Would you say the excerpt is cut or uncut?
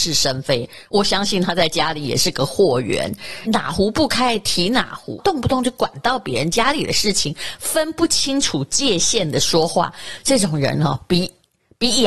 cut